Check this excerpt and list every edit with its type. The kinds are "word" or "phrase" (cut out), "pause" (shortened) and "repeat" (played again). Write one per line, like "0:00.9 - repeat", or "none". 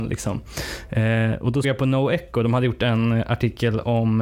0:01.6 - word